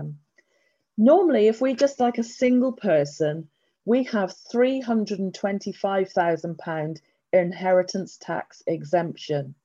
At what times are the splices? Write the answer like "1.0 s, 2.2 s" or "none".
none